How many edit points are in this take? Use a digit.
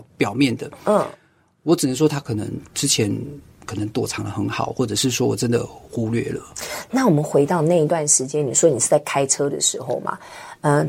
0